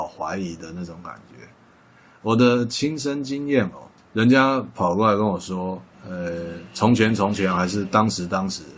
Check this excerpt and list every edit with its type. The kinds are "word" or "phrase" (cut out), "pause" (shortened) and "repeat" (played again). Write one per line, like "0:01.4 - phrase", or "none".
0:04.0 - pause